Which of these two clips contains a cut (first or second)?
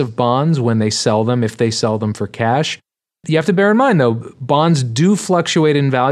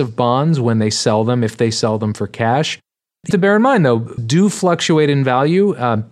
second